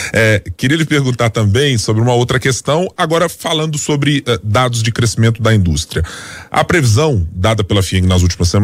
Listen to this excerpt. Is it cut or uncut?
uncut